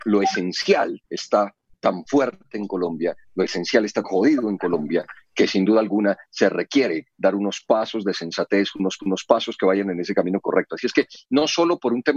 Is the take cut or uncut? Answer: cut